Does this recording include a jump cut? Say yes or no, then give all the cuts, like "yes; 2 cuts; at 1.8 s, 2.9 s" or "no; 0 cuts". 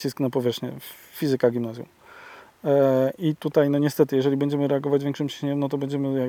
no; 0 cuts